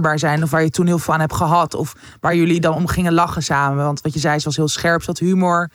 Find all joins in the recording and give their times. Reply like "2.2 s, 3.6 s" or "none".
none